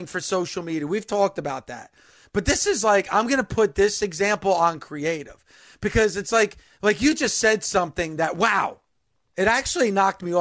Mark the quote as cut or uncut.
uncut